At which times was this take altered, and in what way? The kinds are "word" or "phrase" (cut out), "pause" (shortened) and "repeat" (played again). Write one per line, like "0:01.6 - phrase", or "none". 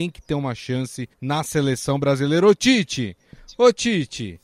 0:01.1 - pause